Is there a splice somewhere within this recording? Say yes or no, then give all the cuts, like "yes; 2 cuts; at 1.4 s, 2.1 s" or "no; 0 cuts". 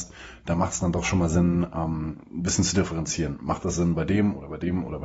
no; 0 cuts